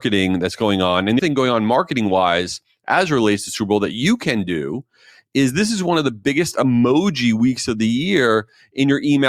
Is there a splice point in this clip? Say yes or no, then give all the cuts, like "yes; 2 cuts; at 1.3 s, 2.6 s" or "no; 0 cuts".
yes; 1 cut; at 1.2 s